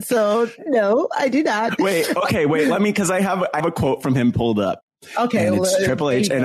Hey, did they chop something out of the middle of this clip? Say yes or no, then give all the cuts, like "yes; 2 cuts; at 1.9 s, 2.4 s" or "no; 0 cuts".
yes; 1 cut; at 3.6 s